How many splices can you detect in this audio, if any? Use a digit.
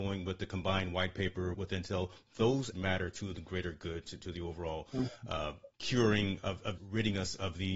4